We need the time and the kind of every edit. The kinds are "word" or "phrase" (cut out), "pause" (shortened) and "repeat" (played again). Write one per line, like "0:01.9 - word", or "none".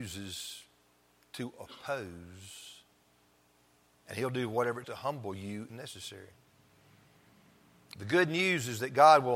0:04.8 - word
0:05.7 - word